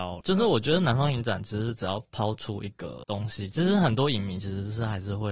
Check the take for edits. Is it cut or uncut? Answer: uncut